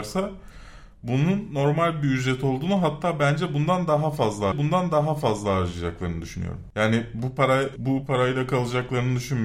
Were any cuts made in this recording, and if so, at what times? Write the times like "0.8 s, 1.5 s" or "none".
4.5 s, 7.8 s